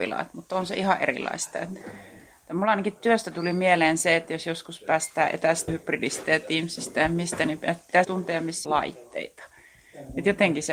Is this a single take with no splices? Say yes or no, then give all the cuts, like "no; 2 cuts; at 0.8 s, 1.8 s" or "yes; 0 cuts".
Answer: no; 3 cuts; at 5.7 s, 8.0 s, 8.6 s